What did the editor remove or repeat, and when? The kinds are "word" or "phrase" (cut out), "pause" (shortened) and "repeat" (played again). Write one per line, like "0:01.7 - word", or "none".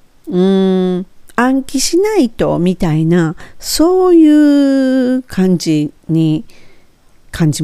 0:06.0 - pause